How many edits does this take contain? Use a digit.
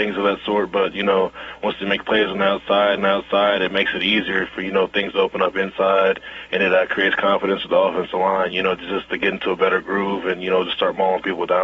1